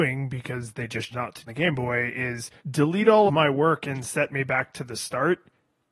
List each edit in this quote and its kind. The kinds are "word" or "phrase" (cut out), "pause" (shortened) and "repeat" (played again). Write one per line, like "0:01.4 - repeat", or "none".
0:01.1 - word
0:01.5 - phrase
0:02.6 - pause
0:03.3 - word